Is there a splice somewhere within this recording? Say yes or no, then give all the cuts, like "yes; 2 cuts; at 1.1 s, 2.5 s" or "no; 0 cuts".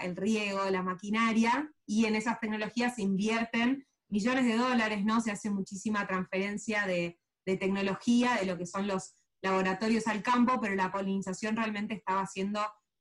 no; 0 cuts